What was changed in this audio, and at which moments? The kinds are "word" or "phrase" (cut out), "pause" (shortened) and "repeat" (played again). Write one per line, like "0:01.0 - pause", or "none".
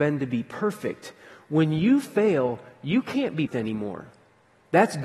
0:03.5 - word